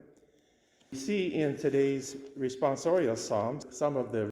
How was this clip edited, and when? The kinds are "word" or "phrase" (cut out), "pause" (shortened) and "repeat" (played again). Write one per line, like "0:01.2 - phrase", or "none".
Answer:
none